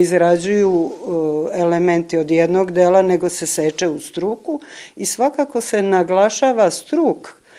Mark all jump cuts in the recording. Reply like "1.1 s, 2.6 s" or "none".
none